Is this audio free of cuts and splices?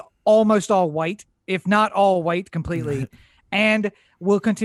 yes; 0 cuts

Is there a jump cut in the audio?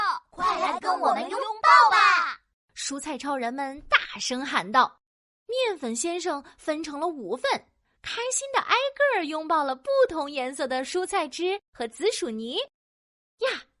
no; 0 cuts

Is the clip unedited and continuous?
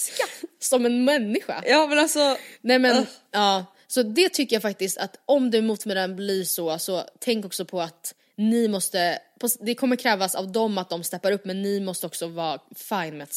yes; 0 cuts

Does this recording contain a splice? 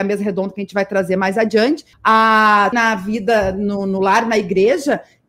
yes; 2 cuts; at 1.9 s, 2.7 s

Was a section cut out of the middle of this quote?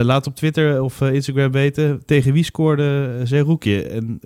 no; 0 cuts

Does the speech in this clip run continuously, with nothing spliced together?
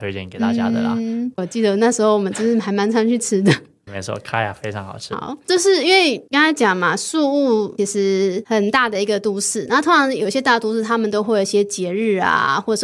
no; 1 cut; at 3.9 s

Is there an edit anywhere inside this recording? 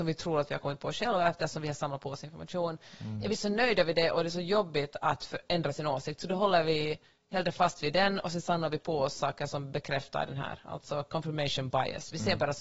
no; 0 cuts

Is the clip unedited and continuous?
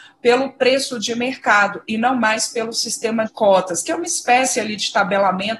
no; 1 cut; at 3.3 s

